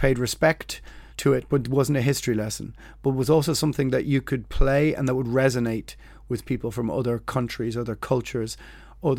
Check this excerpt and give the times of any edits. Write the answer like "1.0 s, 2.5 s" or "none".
1.1 s